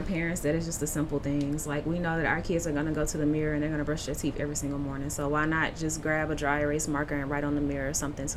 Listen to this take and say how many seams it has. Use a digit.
0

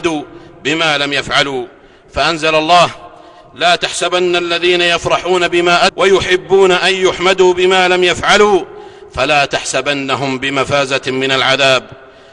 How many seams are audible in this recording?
1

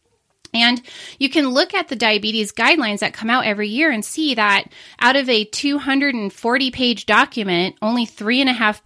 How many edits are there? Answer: 0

